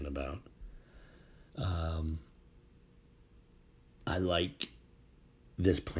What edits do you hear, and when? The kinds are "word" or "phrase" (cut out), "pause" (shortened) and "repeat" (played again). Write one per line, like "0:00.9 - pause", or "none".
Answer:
0:01.5 - pause